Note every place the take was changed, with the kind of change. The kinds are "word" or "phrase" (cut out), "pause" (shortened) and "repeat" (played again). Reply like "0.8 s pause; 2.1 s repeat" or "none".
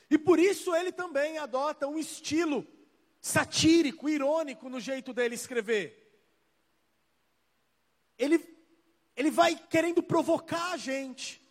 9.6 s pause